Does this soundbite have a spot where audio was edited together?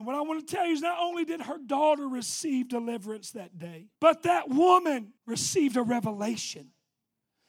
yes; 2 cuts; at 3.9 s, 5.2 s

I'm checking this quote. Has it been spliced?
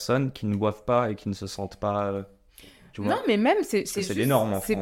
no; 0 cuts

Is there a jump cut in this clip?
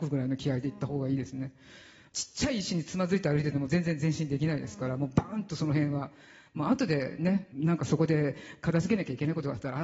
no; 0 cuts

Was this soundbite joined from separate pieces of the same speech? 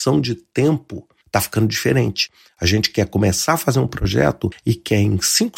no; 0 cuts

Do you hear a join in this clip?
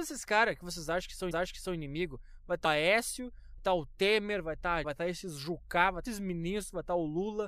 yes; 5 cuts; at 1.3 s, 2.7 s, 3.6 s, 4.8 s, 6.1 s

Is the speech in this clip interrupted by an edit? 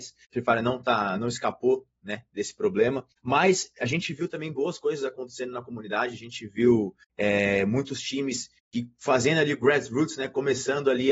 yes; 3 cuts; at 3.1 s, 7.0 s, 8.6 s

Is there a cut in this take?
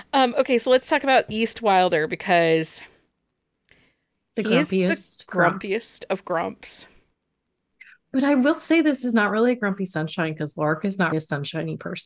yes; 1 cut; at 11.1 s

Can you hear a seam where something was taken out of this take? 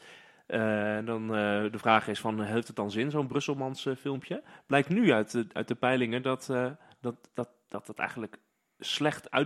no; 0 cuts

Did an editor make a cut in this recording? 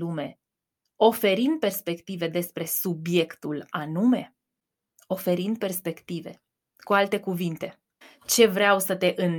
no; 0 cuts

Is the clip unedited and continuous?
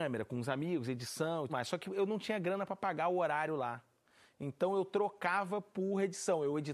no; 1 cut; at 1.5 s

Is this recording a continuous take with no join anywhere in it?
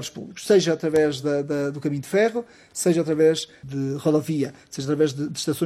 yes; 0 cuts

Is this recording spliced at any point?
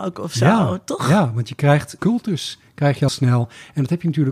yes; 2 cuts; at 2.0 s, 3.1 s

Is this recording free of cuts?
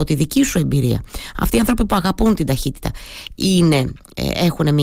yes; 0 cuts

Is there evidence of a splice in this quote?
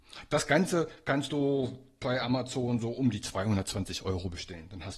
no; 0 cuts

